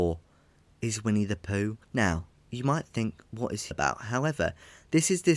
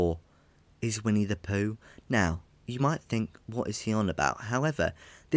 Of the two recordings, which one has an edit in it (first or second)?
first